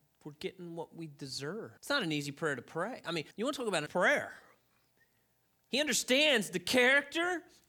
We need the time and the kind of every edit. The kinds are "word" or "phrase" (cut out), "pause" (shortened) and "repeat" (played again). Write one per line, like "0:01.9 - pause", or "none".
0:01.8 - pause
0:03.3 - pause
0:03.9 - phrase

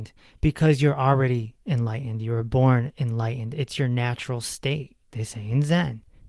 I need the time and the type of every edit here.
0:05.1 - word

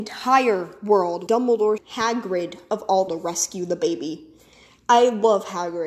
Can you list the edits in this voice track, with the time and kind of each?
0:01.3 - word
0:01.8 - word
0:03.1 - word

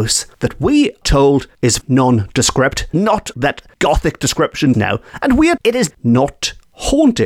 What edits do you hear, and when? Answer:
0:01.0 - word
0:01.8 - word
0:02.9 - word
0:03.3 - word
0:04.7 - word
0:05.6 - word
0:05.9 - word

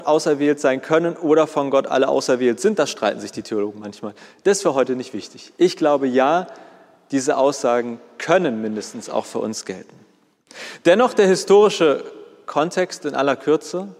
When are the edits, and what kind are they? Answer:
none

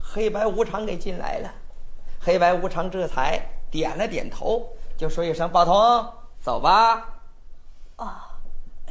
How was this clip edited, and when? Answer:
0:06.3 - word

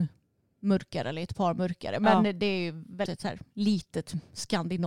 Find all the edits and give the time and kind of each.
0:03.1 - word

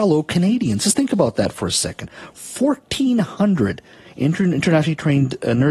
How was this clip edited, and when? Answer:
none

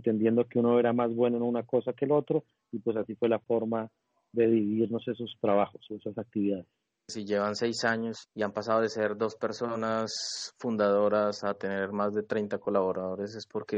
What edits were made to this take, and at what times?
none

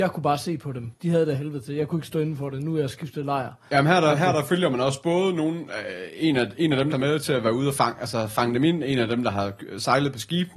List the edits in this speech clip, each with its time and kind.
0:00.9 - pause
0:06.9 - phrase

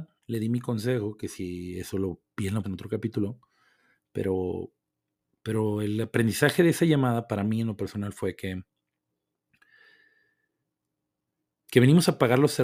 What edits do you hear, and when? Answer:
0:02.6 - word

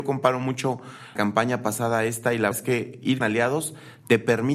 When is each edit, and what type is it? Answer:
0:01.1 - word
0:02.5 - word
0:03.2 - word

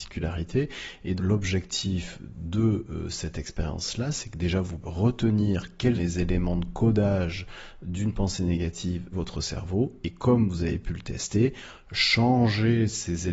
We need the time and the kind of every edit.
0:01.2 - word
0:04.8 - word
0:05.9 - word
0:09.1 - word

